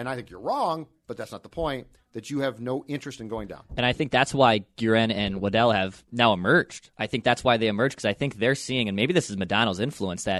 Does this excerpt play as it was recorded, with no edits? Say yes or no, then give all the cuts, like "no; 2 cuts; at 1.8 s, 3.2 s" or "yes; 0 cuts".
yes; 0 cuts